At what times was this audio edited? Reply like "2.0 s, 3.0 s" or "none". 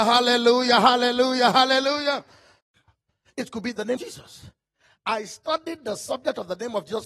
4.0 s